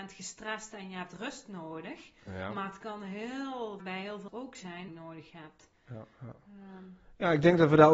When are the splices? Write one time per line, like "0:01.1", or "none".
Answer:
0:03.8
0:04.3
0:04.9

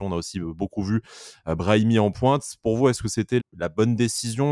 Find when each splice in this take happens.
0:03.4

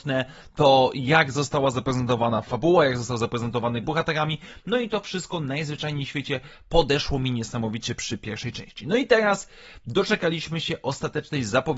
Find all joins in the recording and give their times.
0:03.8

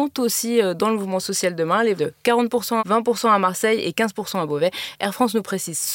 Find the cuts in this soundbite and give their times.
0:02.0
0:02.8

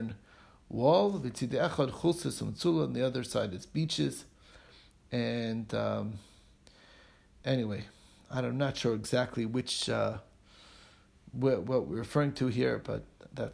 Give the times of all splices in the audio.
none

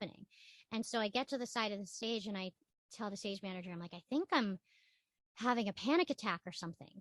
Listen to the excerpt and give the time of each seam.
none

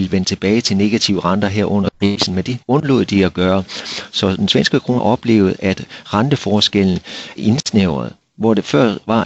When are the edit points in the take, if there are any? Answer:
0:02.6
0:05.0
0:07.4

